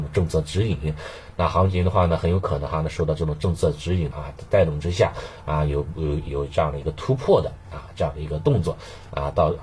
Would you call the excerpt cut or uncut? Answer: cut